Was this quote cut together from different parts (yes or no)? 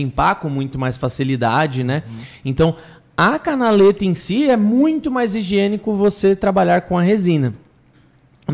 no